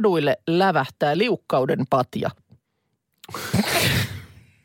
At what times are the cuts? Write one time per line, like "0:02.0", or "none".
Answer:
none